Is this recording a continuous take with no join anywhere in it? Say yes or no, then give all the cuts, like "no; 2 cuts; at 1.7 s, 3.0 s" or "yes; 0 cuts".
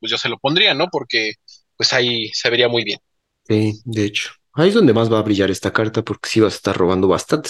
yes; 0 cuts